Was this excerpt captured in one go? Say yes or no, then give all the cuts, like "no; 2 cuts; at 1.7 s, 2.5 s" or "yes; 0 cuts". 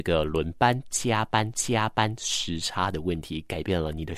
no; 1 cut; at 1.5 s